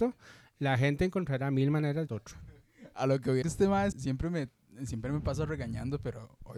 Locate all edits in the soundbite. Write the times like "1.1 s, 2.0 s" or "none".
2.1 s, 3.4 s, 3.9 s

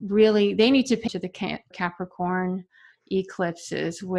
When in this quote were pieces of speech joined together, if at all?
1.1 s, 1.7 s

